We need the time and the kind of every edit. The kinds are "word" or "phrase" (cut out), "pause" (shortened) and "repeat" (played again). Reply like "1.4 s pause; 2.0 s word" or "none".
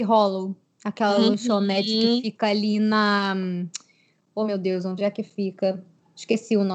none